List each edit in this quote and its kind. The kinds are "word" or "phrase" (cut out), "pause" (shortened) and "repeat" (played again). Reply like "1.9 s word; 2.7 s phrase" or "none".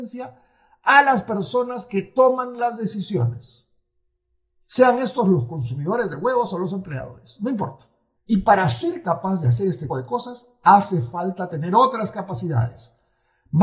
9.9 s word